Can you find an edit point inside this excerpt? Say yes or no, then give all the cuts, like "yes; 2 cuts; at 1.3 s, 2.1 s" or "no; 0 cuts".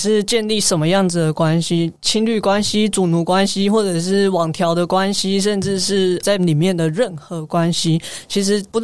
yes; 1 cut; at 6.4 s